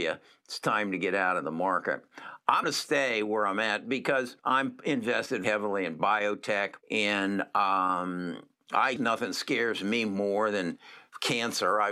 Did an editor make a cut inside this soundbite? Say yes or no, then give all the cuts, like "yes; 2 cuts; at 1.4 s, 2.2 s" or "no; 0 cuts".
yes; 5 cuts; at 2.6 s, 4.4 s, 5.4 s, 6.8 s, 9.0 s